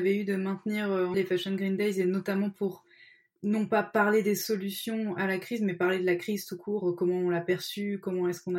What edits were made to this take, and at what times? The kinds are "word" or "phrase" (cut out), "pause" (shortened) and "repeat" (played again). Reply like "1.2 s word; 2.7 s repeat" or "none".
1.1 s word; 3.4 s word